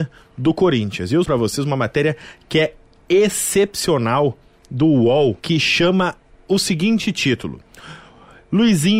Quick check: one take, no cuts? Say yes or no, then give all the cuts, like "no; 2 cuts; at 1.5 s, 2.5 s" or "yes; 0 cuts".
no; 2 cuts; at 1.3 s, 5.4 s